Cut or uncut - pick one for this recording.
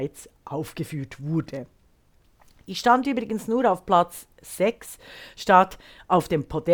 uncut